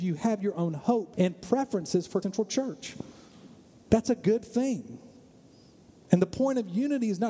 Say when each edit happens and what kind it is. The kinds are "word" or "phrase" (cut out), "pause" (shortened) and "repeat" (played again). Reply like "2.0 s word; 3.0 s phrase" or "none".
1.1 s word; 2.2 s word